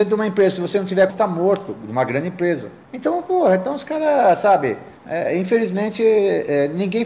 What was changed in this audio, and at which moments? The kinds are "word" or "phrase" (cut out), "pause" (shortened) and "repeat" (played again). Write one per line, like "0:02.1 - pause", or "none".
0:01.1 - word
0:02.8 - pause
0:05.0 - pause